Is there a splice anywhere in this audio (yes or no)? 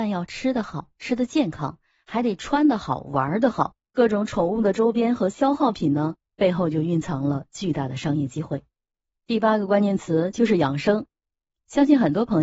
no